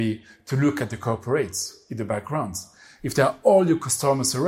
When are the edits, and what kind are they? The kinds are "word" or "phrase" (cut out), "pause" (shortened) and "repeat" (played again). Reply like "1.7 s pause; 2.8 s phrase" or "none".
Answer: none